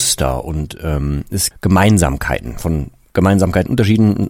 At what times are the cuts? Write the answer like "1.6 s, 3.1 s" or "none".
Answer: 1.5 s